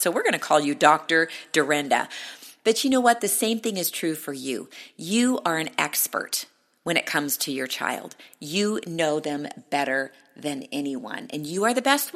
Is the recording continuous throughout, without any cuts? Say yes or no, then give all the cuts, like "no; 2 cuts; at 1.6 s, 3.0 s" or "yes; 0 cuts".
yes; 0 cuts